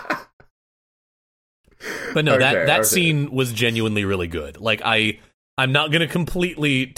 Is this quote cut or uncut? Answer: uncut